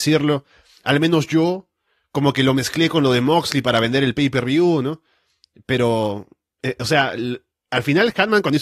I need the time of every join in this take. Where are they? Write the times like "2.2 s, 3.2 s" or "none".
none